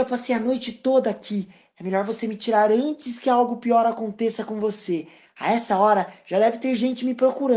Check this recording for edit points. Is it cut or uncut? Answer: uncut